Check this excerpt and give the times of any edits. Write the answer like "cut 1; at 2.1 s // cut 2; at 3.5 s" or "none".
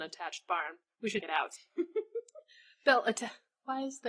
cut 1; at 1.2 s